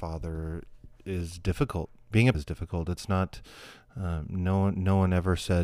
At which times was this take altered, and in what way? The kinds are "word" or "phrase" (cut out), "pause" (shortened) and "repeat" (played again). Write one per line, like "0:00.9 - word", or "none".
0:02.3 - word